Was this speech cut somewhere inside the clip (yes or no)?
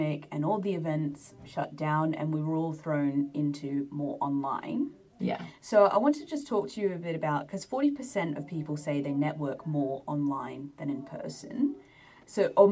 no